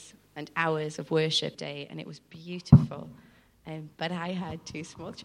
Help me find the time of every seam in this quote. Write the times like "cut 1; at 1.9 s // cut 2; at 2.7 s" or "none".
cut 1; at 1.5 s

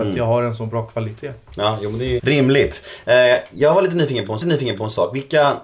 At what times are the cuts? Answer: cut 1; at 2.2 s // cut 2; at 4.4 s

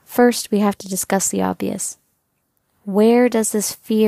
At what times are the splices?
cut 1; at 2.4 s

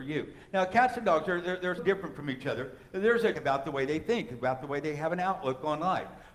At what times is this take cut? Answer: cut 1; at 1.8 s // cut 2; at 3.3 s

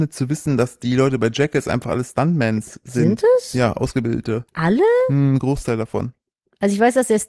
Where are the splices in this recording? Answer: cut 1; at 4.5 s

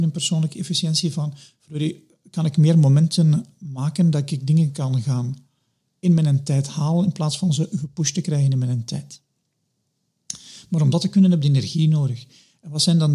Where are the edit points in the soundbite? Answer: none

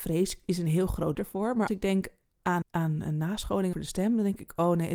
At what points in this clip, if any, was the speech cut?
cut 1; at 1.1 s // cut 2; at 1.7 s // cut 3; at 2.6 s // cut 4; at 3.7 s

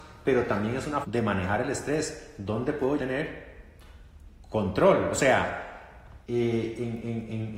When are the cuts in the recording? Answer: cut 1; at 1.0 s // cut 2; at 3.0 s // cut 3; at 6.2 s

